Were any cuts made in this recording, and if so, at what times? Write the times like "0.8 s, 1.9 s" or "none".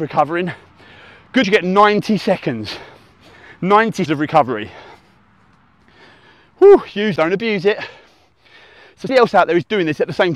1.4 s, 4.1 s, 7.2 s, 9.1 s